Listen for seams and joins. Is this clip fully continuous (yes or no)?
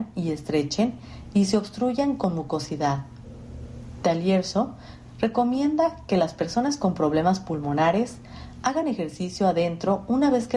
yes